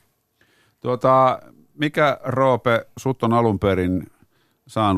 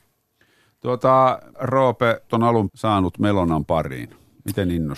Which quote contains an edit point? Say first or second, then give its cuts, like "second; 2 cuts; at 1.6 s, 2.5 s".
second; 3 cuts; at 1.5 s, 2.3 s, 2.7 s